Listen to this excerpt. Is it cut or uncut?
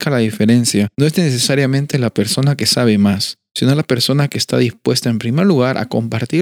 cut